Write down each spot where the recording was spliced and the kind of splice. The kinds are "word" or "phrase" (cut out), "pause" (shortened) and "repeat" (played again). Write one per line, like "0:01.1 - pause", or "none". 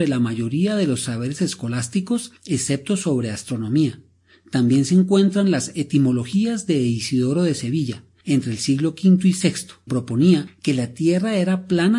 0:09.9 - word